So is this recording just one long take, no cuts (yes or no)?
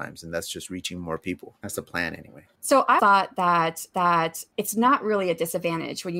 no